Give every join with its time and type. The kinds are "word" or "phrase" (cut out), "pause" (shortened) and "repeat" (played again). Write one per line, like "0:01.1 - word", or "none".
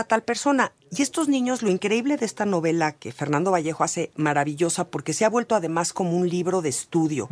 none